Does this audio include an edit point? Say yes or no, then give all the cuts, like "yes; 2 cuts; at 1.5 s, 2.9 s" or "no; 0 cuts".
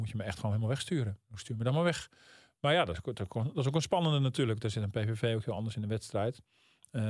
no; 0 cuts